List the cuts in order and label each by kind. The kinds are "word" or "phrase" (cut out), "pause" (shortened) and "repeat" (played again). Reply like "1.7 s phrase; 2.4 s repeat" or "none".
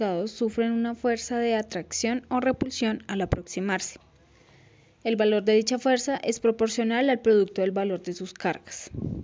none